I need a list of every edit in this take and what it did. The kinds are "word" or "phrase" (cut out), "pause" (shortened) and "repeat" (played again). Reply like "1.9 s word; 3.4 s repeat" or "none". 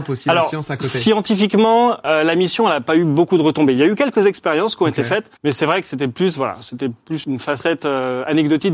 5.4 s pause; 7.2 s word